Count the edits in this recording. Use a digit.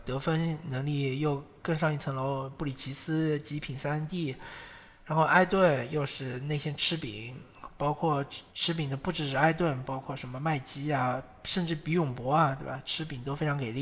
1